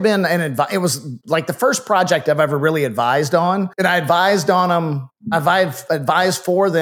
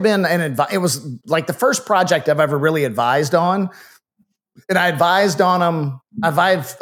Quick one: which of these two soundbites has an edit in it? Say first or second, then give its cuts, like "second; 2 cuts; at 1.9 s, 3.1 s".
first; 1 cut; at 3.7 s